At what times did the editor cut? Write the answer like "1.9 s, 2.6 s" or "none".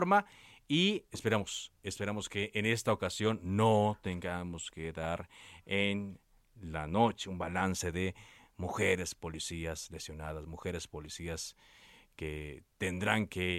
none